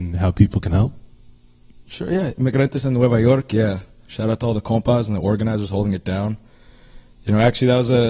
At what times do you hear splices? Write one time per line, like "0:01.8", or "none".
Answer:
none

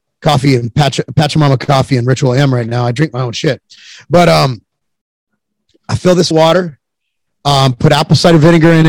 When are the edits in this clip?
0:06.3

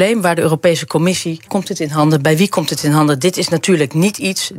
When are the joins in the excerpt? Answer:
0:01.5

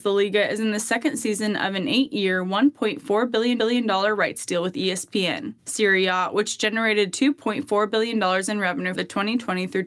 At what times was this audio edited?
0:03.6
0:05.6
0:08.9

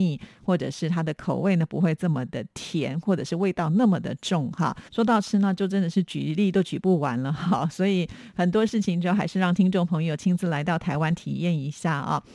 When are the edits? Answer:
0:04.9

